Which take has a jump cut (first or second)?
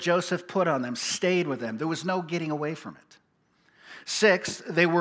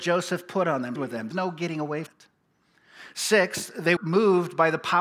second